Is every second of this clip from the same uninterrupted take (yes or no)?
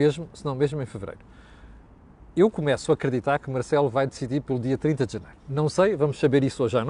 yes